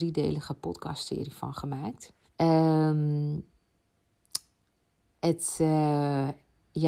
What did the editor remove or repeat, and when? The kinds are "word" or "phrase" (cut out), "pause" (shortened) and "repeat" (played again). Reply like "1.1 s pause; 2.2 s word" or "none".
2.3 s pause

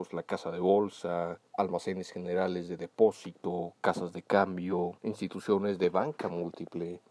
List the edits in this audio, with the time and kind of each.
1.5 s pause; 3.8 s pause; 5.0 s pause

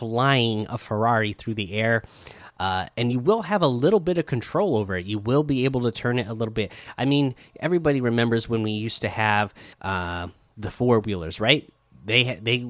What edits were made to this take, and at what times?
9.7 s pause

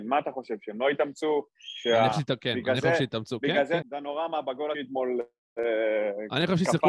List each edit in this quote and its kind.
2.1 s word; 3.8 s word; 4.7 s word

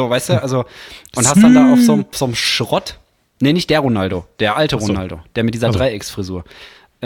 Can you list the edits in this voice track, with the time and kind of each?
2.1 s word

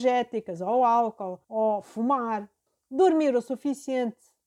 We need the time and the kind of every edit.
1.4 s pause; 2.7 s pause

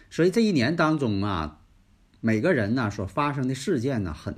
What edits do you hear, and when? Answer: none

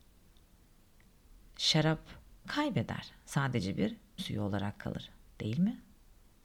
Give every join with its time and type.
2.4 s word; 4.2 s word

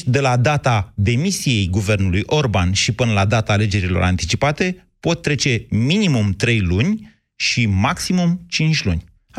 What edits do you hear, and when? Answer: none

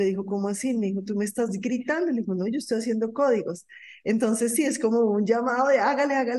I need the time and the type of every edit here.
none

